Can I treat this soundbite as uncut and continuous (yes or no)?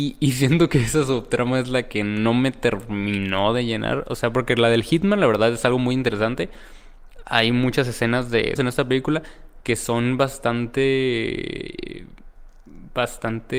no